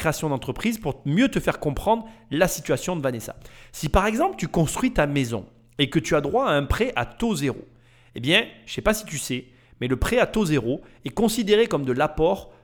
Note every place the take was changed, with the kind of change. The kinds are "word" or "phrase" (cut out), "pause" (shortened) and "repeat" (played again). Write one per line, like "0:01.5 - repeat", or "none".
none